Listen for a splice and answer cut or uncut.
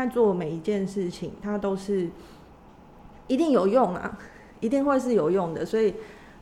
uncut